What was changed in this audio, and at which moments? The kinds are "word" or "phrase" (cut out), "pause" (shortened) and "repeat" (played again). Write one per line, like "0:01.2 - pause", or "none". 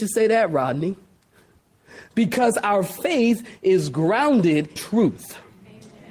0:04.8 - word